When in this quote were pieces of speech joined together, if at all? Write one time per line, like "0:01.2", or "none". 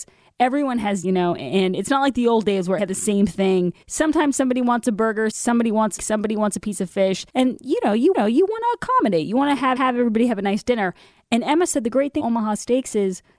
0:01.0
0:02.8
0:03.8
0:05.3
0:06.0
0:07.3
0:08.1
0:09.8
0:12.2

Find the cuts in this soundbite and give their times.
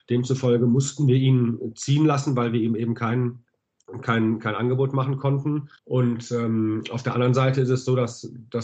0:05.8

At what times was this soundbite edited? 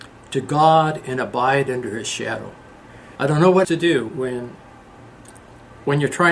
0:03.2
0:03.6
0:04.1

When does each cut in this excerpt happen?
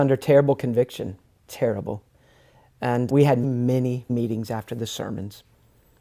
0:03.1
0:03.4
0:04.1

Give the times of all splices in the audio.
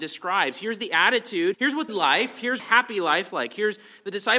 0:01.5
0:01.9
0:02.6
0:03.3

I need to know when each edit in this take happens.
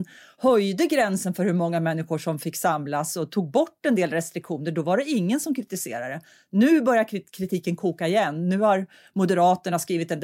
none

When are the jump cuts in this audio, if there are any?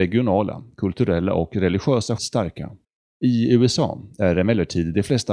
0:02.2
0:02.8

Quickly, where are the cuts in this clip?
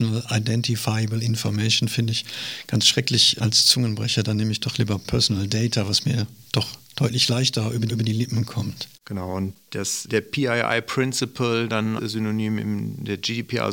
0:07.9
0:08.9
0:10.1
0:12.0

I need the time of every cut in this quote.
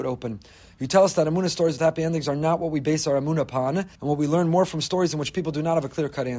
0:03.9

